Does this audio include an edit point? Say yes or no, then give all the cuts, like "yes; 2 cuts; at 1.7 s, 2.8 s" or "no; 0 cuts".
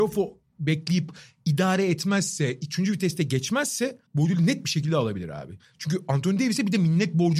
yes; 1 cut; at 4.1 s